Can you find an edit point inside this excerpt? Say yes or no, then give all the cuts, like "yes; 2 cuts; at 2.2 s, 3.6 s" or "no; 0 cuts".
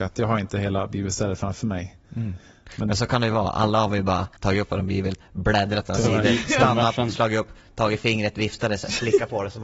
yes; 1 cut; at 4.4 s